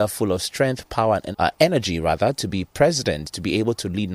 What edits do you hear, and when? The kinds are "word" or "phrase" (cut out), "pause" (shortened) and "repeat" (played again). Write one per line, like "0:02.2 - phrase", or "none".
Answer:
0:01.3 - word